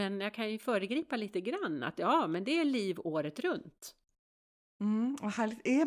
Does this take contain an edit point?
no; 0 cuts

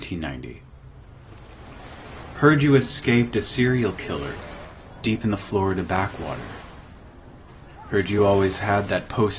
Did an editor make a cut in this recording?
no; 0 cuts

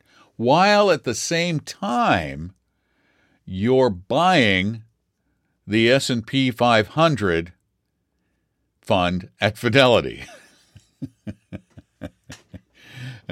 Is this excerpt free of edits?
yes; 0 cuts

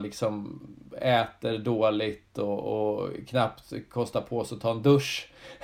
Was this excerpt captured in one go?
yes; 0 cuts

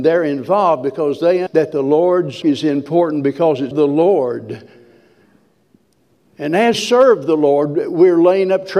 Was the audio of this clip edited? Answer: yes; 4 cuts; at 1.5 s, 2.4 s, 3.7 s, 6.7 s

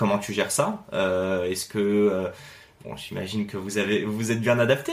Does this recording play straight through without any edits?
yes; 0 cuts

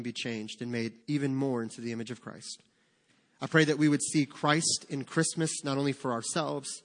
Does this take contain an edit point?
yes; 1 cut; at 1.0 s

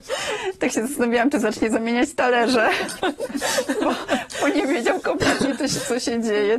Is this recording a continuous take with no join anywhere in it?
yes; 0 cuts

